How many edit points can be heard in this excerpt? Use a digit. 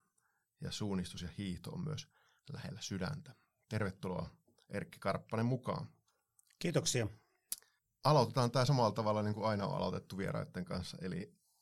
0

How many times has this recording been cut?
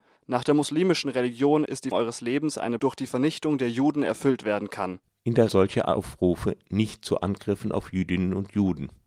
3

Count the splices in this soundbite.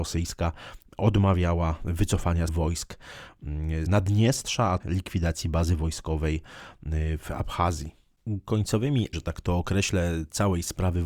4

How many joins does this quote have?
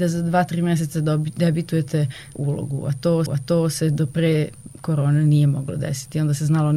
2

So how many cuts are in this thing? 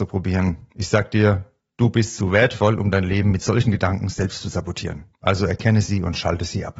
0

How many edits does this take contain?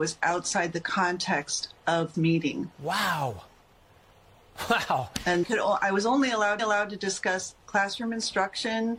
5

